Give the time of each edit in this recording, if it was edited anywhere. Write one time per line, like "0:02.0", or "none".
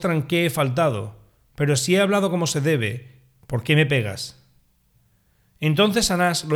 none